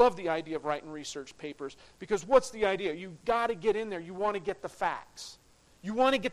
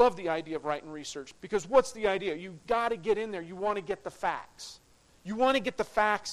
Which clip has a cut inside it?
second; 1 cut; at 1.4 s

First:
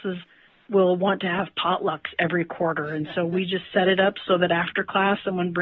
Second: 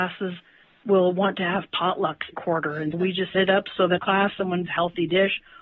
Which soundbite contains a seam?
second; 5 cuts; at 2.3 s, 2.9 s, 3.3 s, 4.0 s, 4.7 s

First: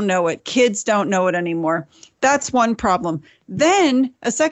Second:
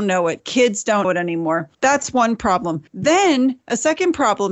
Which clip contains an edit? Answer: second; 3 cuts; at 1.0 s, 1.7 s, 2.9 s

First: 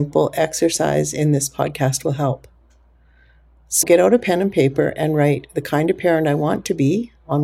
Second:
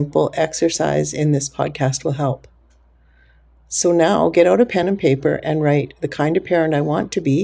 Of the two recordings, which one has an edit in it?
first; 1 cut; at 3.8 s

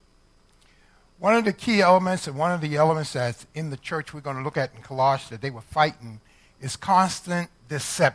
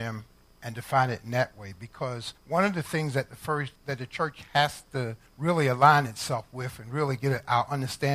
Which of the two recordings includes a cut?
second; 3 cuts; at 2.4 s, 3.8 s, 5.3 s

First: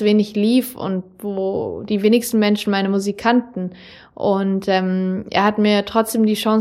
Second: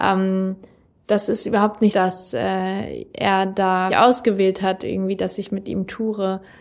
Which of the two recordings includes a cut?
second; 2 cuts; at 1.9 s, 3.9 s

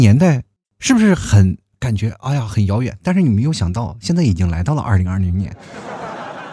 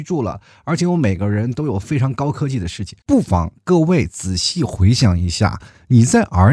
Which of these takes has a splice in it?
second; 1 cut; at 3.0 s

